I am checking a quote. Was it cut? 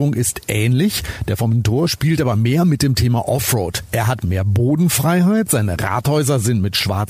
no; 0 cuts

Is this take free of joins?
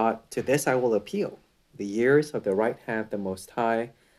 yes; 0 cuts

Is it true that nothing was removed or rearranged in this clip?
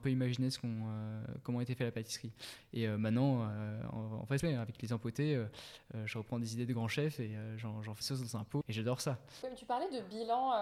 no; 3 cuts; at 4.4 s, 8.0 s, 8.6 s

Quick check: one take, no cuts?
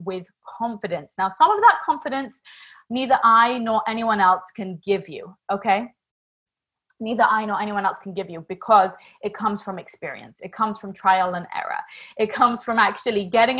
yes; 0 cuts

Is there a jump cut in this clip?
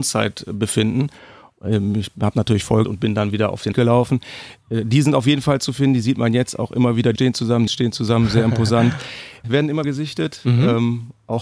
yes; 6 cuts; at 2.8 s, 3.7 s, 7.1 s, 7.7 s, 9.4 s, 9.8 s

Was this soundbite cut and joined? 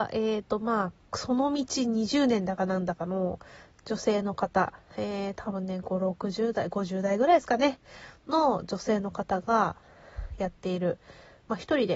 no; 0 cuts

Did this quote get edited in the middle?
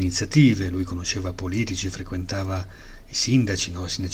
no; 0 cuts

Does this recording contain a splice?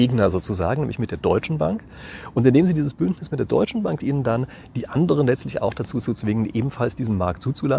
yes; 1 cut; at 4.0 s

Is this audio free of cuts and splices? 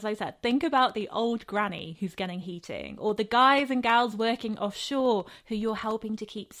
yes; 0 cuts

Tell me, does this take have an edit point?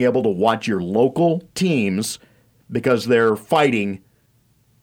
no; 0 cuts

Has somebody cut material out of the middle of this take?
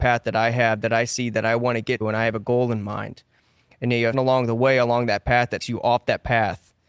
yes; 3 cuts; at 2.0 s, 4.1 s, 5.6 s

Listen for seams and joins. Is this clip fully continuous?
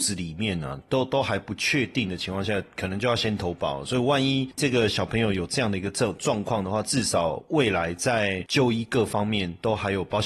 yes; 0 cuts

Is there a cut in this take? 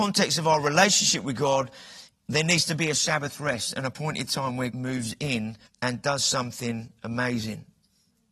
yes; 2 cuts; at 4.7 s, 5.6 s

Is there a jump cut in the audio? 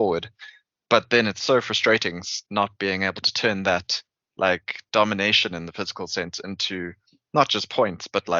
no; 0 cuts

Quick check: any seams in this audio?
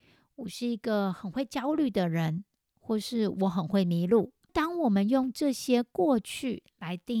no; 0 cuts

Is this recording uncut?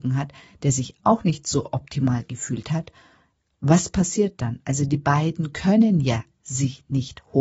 yes; 0 cuts

